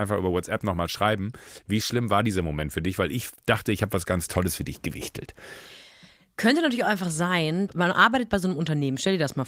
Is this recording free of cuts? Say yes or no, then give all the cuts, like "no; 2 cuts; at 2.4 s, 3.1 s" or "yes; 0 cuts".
yes; 0 cuts